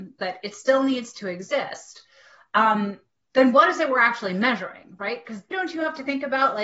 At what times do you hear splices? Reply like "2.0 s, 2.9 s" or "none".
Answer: 5.5 s